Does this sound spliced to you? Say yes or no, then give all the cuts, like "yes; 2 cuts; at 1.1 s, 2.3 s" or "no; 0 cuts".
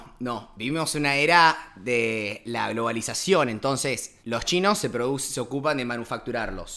yes; 1 cut; at 4.2 s